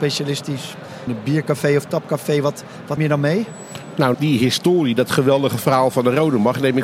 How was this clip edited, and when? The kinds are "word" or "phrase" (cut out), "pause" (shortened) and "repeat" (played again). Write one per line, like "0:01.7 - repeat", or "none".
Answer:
0:01.1 - word
0:03.0 - word
0:04.1 - word